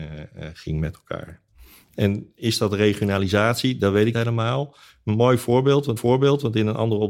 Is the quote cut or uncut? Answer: cut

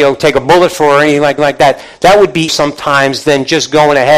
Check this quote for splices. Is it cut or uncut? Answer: cut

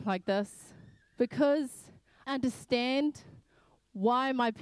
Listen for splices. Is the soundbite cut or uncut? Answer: cut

